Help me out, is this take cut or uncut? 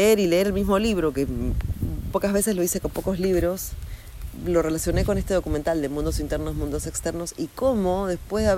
cut